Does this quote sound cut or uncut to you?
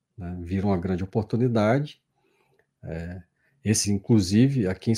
cut